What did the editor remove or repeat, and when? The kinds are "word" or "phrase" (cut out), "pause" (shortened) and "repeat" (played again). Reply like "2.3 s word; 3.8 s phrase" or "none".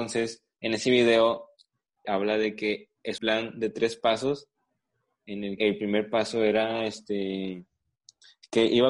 2.0 s word; 3.2 s word; 5.6 s word